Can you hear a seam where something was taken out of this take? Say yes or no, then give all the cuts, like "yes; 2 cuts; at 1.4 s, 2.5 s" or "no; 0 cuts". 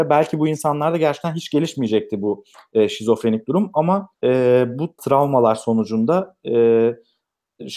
yes; 2 cuts; at 4.1 s, 5.0 s